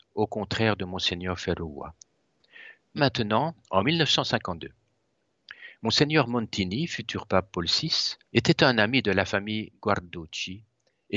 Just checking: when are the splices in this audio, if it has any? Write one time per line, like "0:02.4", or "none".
0:03.0
0:03.6
0:08.2